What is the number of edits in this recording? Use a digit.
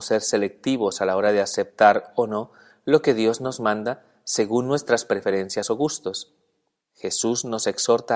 0